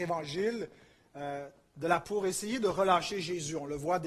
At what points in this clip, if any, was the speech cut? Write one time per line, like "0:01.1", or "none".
0:02.0